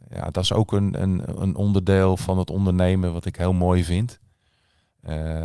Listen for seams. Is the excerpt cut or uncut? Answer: uncut